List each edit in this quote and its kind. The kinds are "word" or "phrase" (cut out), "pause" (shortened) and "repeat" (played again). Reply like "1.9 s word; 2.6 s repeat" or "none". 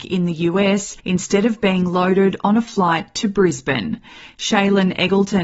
1.0 s pause